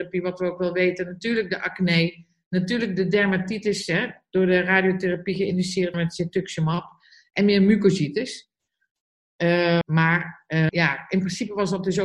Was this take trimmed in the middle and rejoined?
yes; 3 cuts; at 5.9 s, 9.8 s, 10.7 s

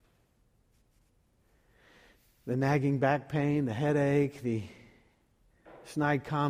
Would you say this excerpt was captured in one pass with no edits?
yes; 0 cuts

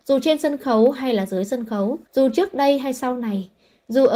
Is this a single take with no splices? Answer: no; 1 cut; at 2.0 s

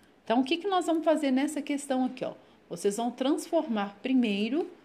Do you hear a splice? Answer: no; 0 cuts

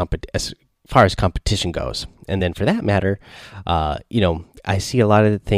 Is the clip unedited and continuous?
yes; 0 cuts

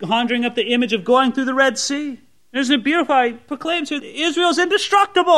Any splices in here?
yes; 2 cuts; at 2.4 s, 4.0 s

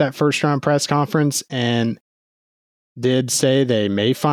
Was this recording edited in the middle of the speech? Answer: no; 0 cuts

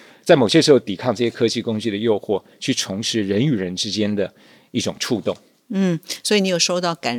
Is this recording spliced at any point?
no; 0 cuts

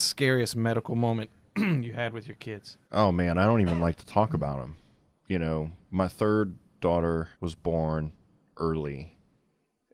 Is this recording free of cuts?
no; 2 cuts; at 2.8 s, 7.3 s

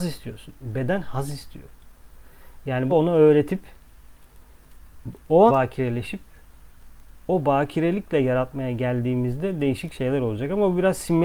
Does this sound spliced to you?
yes; 2 cuts; at 2.9 s, 5.5 s

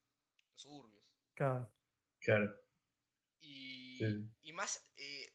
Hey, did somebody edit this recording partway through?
no; 0 cuts

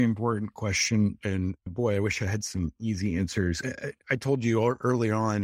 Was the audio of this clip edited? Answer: no; 0 cuts

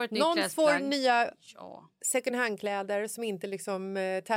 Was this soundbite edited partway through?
no; 0 cuts

